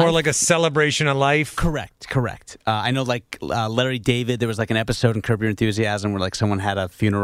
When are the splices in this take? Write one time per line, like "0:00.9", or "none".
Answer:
none